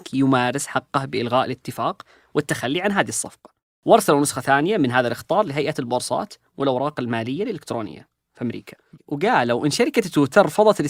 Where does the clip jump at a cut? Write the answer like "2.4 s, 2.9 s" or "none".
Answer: none